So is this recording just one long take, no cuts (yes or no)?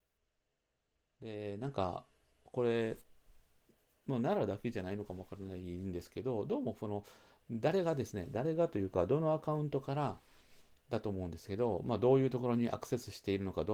yes